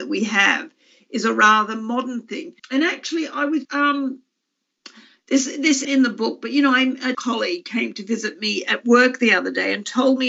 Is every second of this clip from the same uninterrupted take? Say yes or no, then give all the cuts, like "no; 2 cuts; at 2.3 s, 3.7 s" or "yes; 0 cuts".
no; 4 cuts; at 2.6 s, 3.6 s, 5.8 s, 7.1 s